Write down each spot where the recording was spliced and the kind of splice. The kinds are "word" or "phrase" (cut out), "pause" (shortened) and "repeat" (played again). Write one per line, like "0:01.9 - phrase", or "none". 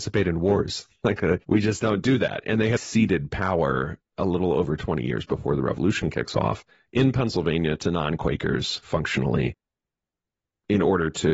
0:01.4 - pause
0:02.8 - word
0:04.1 - pause
0:06.7 - pause